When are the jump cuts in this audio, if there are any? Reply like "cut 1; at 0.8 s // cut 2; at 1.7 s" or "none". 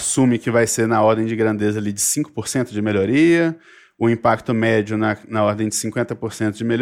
none